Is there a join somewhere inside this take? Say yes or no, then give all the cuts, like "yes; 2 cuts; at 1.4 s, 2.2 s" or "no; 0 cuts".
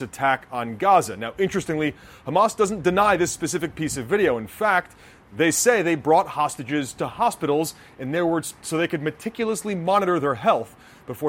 no; 0 cuts